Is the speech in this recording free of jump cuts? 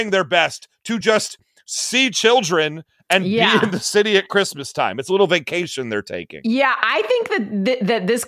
yes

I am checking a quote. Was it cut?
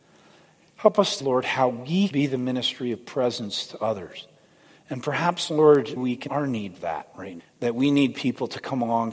yes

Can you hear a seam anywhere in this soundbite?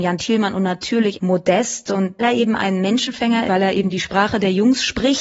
yes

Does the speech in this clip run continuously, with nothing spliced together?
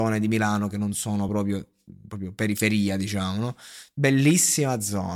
yes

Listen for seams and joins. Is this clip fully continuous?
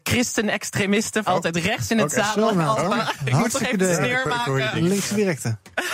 no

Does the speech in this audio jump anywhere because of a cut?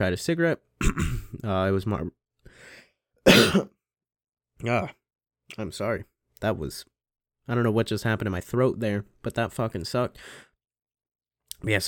no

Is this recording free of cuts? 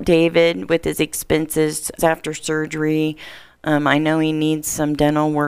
no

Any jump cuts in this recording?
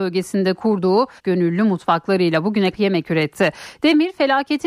yes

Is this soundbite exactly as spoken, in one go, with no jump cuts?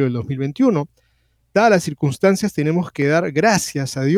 yes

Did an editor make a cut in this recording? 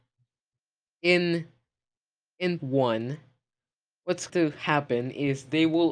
yes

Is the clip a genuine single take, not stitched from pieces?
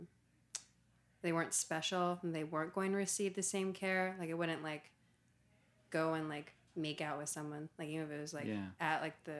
yes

